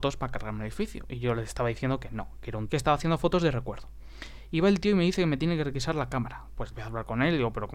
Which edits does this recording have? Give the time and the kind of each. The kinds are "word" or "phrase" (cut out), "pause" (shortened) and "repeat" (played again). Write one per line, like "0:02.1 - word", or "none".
0:02.7 - phrase
0:06.7 - word